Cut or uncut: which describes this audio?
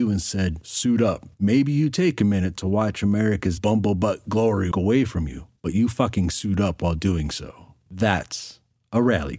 cut